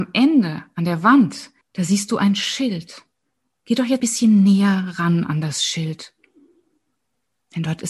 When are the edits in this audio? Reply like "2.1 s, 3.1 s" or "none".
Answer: 1.6 s, 3.2 s, 4.0 s